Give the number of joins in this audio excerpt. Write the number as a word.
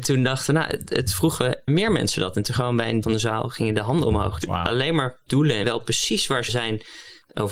seven